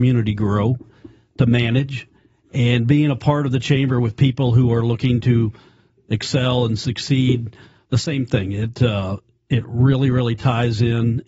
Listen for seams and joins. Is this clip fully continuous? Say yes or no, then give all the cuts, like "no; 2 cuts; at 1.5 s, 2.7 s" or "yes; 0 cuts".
yes; 0 cuts